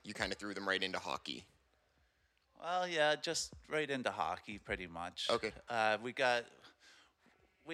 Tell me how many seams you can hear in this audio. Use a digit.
0